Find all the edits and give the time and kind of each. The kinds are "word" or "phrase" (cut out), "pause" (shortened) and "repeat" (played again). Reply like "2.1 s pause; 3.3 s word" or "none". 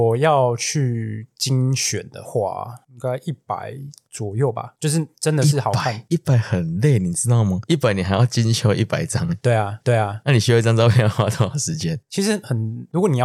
9.8 s repeat